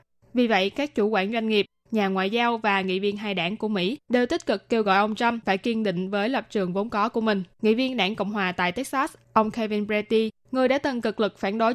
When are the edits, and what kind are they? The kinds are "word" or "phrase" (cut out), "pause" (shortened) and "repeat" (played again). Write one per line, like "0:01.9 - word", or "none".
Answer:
0:07.5 - pause